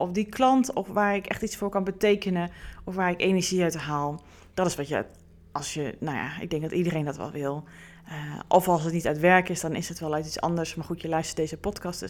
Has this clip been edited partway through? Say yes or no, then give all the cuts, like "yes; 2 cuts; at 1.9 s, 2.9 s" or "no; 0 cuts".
no; 0 cuts